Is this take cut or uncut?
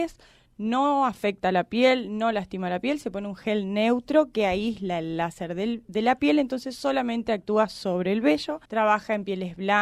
cut